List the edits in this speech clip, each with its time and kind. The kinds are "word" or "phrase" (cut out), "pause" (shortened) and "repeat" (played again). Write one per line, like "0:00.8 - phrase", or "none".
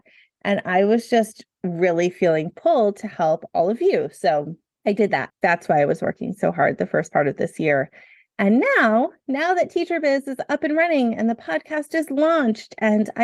0:05.3 - pause